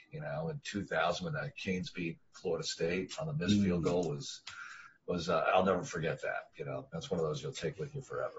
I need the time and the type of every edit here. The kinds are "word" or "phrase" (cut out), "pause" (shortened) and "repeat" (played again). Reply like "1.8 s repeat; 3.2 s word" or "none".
4.9 s pause